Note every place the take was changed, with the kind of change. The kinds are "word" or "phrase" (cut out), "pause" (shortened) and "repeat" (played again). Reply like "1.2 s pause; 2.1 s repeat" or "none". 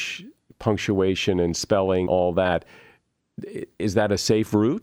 2.1 s word